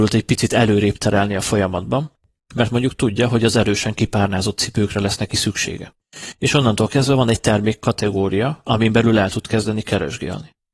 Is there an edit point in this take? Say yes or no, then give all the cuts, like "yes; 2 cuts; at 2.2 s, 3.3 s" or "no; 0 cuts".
no; 0 cuts